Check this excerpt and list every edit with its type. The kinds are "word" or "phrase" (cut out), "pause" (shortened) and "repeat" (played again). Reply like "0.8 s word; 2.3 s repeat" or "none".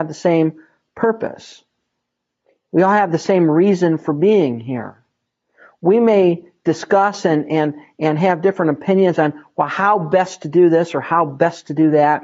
none